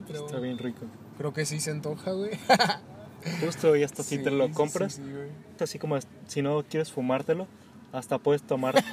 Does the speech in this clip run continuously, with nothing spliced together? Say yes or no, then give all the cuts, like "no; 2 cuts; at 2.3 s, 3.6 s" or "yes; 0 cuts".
no; 1 cut; at 5.6 s